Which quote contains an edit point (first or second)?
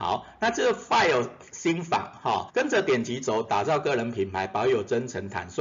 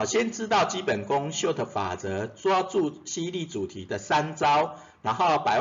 first